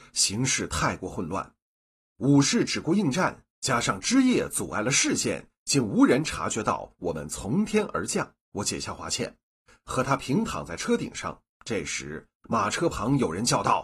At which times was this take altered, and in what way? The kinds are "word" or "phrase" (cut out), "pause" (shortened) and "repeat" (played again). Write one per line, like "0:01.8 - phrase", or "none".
0:03.5 - pause
0:08.4 - pause
0:11.5 - pause